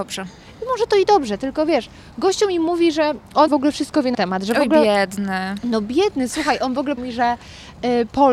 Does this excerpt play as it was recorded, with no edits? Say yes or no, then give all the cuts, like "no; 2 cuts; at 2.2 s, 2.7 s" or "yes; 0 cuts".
no; 3 cuts; at 3.5 s, 4.1 s, 7.0 s